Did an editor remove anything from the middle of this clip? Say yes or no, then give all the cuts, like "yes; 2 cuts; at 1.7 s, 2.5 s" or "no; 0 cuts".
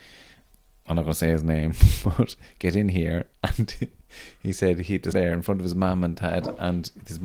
yes; 1 cut; at 5.1 s